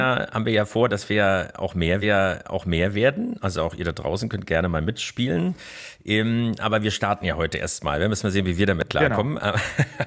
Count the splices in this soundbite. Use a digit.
1